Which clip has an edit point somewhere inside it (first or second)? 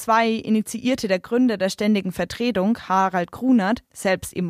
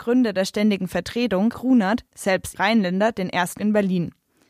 second